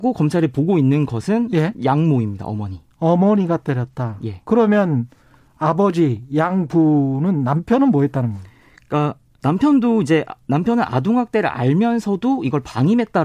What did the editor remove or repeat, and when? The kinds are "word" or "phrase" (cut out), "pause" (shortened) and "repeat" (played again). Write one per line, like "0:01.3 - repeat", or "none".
none